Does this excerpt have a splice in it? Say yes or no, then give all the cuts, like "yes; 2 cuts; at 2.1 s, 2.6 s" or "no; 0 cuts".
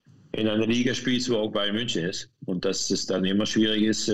no; 0 cuts